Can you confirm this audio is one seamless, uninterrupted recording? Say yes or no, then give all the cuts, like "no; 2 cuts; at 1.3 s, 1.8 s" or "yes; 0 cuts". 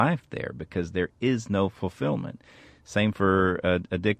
yes; 0 cuts